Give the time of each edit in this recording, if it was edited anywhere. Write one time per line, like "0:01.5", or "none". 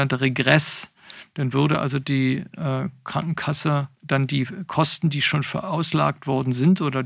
0:03.9